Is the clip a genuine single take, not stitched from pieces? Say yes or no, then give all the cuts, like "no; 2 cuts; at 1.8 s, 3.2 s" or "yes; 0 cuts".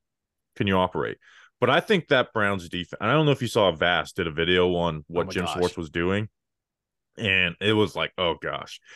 yes; 0 cuts